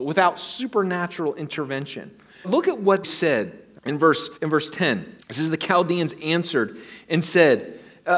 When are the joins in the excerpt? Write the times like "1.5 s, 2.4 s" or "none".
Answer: 2.4 s, 3.0 s, 3.8 s, 4.4 s, 5.2 s